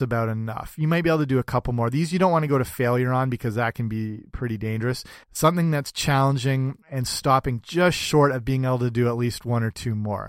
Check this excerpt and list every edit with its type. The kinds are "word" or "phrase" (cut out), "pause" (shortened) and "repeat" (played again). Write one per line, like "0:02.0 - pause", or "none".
0:05.2 - pause
0:06.8 - pause